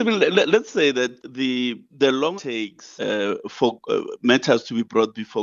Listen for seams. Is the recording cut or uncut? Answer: cut